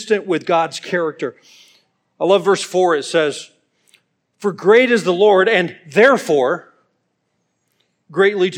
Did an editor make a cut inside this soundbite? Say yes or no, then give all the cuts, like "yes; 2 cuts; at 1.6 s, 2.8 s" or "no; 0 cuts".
no; 0 cuts